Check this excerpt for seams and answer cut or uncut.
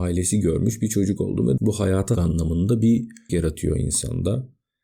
cut